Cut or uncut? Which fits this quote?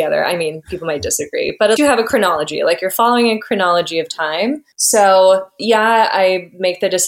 cut